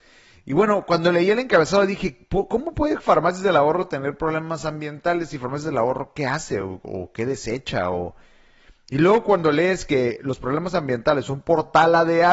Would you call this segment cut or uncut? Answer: uncut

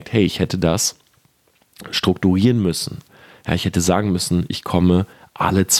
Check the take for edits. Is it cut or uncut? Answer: uncut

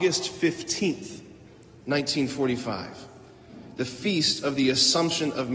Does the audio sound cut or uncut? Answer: uncut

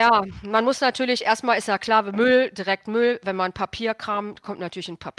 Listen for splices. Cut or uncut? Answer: uncut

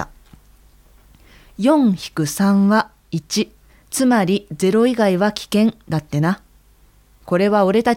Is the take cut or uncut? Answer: cut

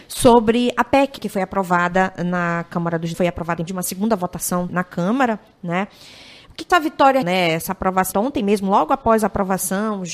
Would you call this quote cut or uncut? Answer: cut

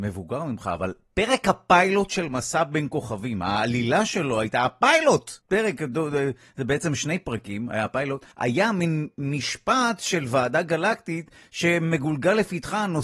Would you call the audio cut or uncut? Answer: cut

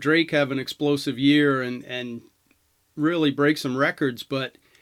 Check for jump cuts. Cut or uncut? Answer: uncut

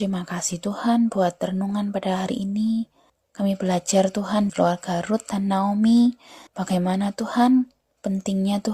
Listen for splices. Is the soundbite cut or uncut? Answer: cut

